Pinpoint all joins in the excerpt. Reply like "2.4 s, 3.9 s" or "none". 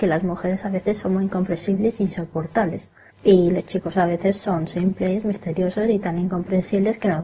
none